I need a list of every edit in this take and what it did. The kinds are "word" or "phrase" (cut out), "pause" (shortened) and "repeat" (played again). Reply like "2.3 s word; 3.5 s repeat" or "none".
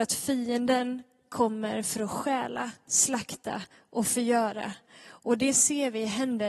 none